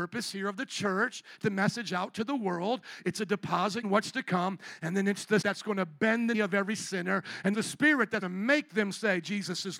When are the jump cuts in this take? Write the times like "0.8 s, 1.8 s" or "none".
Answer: 1.4 s, 3.8 s, 5.4 s, 6.3 s, 7.5 s, 8.2 s